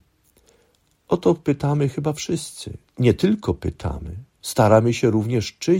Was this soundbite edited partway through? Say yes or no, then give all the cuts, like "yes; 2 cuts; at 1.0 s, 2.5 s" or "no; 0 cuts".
yes; 1 cut; at 2.9 s